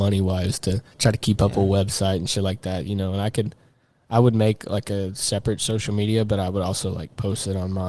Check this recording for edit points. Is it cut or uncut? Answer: cut